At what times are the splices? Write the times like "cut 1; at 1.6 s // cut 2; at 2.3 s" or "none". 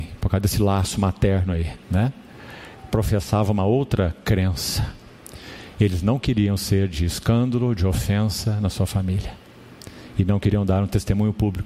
cut 1; at 1.8 s